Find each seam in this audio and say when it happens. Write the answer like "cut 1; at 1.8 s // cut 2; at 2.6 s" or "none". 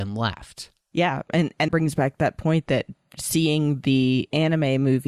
cut 1; at 1.7 s

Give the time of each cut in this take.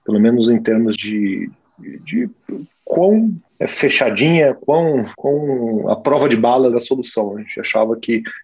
cut 1; at 1.0 s // cut 2; at 3.5 s // cut 3; at 5.1 s // cut 4; at 6.7 s

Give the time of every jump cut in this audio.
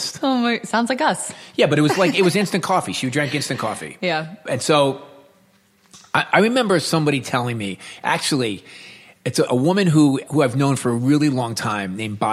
none

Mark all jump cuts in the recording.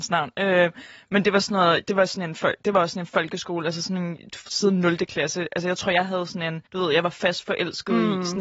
cut 1; at 6.7 s

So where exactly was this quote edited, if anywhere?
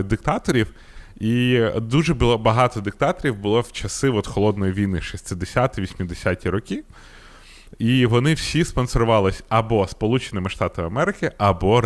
none

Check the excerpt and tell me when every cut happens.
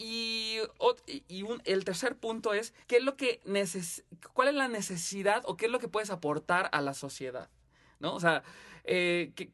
cut 1; at 2.8 s

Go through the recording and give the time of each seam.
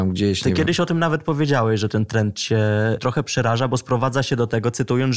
none

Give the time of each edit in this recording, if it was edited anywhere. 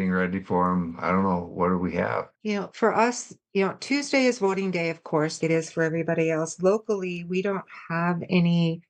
cut 1; at 2.3 s // cut 2; at 5.4 s

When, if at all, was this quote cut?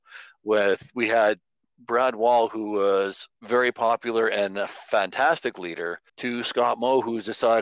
cut 1; at 3.4 s // cut 2; at 6.1 s

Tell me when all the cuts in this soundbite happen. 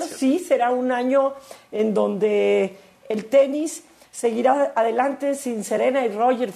none

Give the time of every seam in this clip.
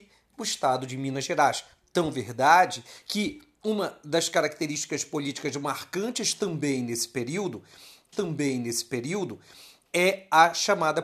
cut 1; at 8.1 s

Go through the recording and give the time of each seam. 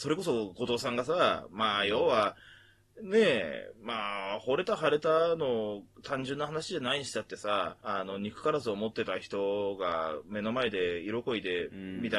cut 1; at 7.8 s

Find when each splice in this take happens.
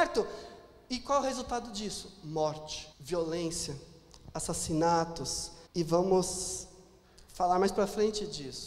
cut 1; at 2.9 s // cut 2; at 5.7 s

